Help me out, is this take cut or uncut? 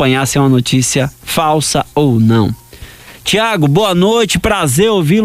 cut